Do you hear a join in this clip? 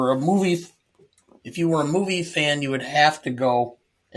no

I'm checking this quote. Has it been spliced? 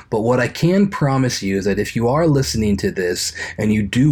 no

